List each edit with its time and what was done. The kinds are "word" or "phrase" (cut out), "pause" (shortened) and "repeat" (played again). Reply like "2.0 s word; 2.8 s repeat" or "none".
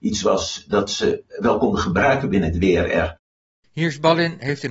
none